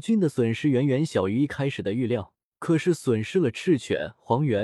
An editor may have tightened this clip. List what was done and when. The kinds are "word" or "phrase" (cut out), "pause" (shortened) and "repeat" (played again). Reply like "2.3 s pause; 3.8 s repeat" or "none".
2.5 s pause